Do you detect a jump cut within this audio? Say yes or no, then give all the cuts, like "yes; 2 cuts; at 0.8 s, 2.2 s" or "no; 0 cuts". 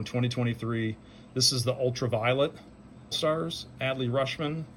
yes; 1 cut; at 3.1 s